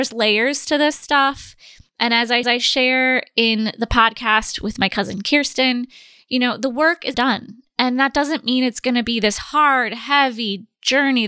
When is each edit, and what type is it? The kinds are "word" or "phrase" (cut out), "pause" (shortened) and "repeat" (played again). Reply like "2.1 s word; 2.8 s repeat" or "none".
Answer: 2.4 s repeat; 7.1 s word